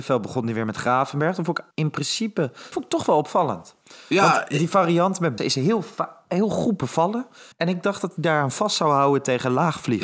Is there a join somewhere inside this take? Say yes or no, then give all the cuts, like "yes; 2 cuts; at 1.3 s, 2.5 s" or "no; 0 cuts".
yes; 4 cuts; at 1.7 s, 2.7 s, 5.4 s, 7.5 s